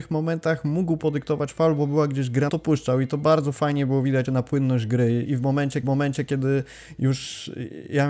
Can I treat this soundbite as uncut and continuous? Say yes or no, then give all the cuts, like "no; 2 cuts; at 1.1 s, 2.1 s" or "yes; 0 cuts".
no; 4 cuts; at 2.5 s, 4.2 s, 5.2 s, 5.8 s